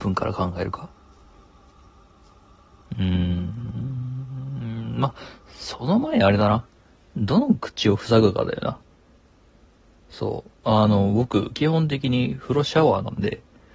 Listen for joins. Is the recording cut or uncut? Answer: uncut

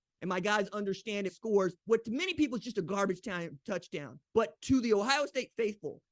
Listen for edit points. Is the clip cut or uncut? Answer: cut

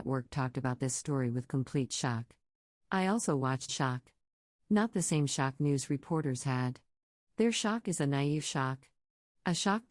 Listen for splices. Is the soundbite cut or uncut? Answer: cut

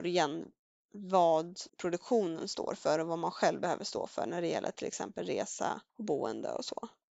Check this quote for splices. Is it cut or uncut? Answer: cut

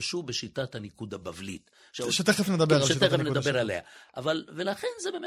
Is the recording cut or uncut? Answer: uncut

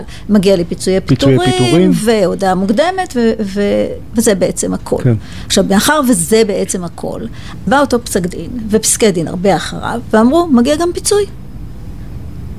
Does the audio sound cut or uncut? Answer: cut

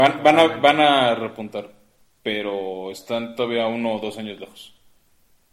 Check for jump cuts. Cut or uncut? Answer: uncut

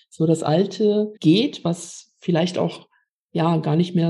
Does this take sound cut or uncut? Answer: cut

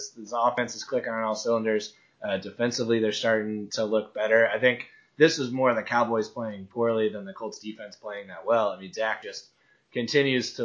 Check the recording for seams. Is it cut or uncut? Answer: uncut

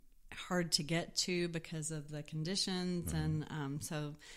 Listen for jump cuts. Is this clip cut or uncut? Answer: uncut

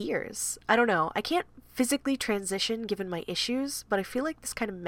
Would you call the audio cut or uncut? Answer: uncut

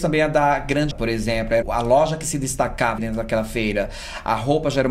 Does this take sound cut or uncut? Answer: cut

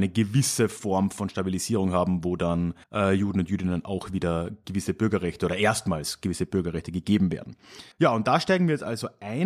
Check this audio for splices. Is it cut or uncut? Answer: cut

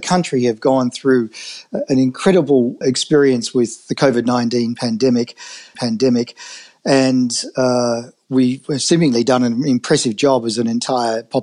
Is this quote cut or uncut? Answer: cut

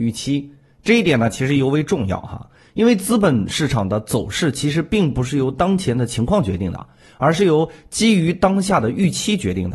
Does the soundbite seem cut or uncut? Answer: uncut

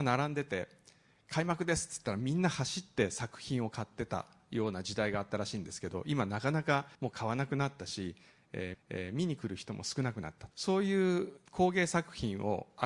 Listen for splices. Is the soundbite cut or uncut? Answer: cut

